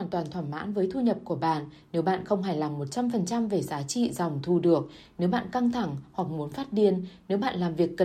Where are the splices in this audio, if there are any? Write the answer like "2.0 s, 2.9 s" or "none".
none